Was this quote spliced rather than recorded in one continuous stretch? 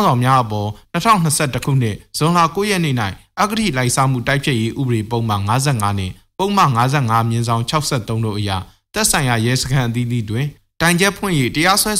no; 0 cuts

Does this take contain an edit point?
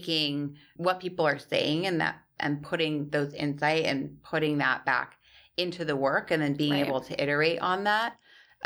no; 0 cuts

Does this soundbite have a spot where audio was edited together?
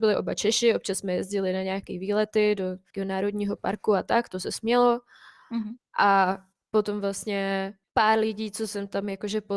no; 0 cuts

